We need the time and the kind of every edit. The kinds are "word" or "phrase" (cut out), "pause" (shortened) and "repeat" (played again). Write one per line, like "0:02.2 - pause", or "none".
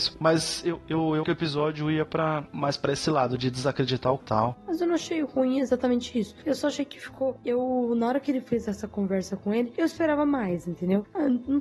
0:01.2 - word
0:04.2 - word